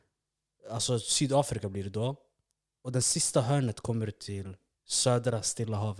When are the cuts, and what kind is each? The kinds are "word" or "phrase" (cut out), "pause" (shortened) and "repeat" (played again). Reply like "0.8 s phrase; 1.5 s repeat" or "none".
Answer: none